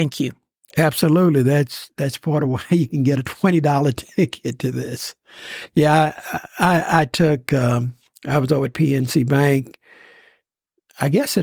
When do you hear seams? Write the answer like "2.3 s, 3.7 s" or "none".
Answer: none